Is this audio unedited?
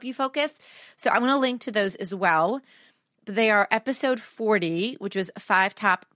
yes; 0 cuts

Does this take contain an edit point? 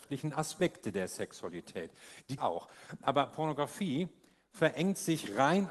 yes; 1 cut; at 2.4 s

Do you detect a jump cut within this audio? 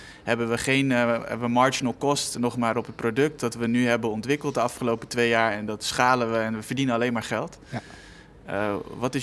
no; 0 cuts

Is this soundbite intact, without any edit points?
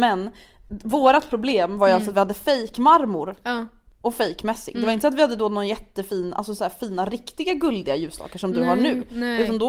yes; 0 cuts

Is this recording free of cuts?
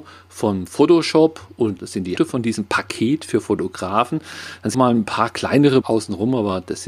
no; 4 cuts; at 1.8 s, 2.2 s, 4.7 s, 5.8 s

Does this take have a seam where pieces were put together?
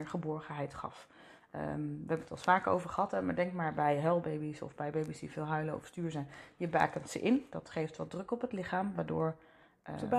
no; 0 cuts

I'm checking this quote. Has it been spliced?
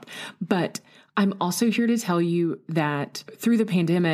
no; 0 cuts

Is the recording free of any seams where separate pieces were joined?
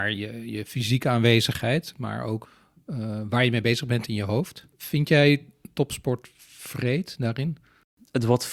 yes; 0 cuts

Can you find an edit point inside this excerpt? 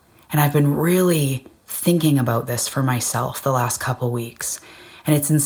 no; 0 cuts

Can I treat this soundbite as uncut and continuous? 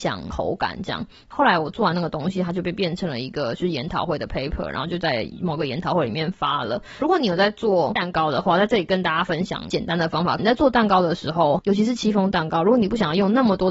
yes; 0 cuts

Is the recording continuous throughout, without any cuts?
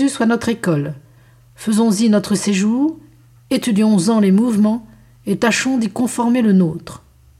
yes; 0 cuts

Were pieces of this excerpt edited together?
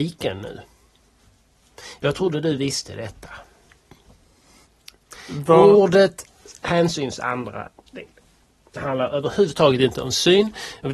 no; 0 cuts

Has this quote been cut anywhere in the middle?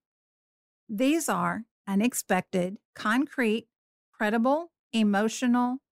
yes; 2 cuts; at 1.7 s, 2.8 s

